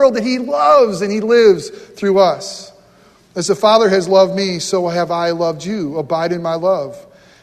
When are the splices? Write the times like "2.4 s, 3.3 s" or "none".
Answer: none